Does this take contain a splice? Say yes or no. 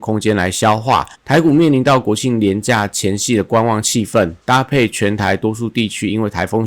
yes